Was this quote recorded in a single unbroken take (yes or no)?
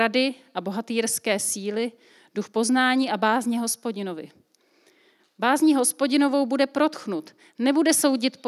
yes